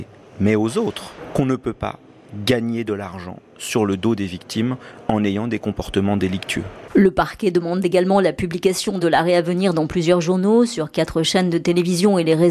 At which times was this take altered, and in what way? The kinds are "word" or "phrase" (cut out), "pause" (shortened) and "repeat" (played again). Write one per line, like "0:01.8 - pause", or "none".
none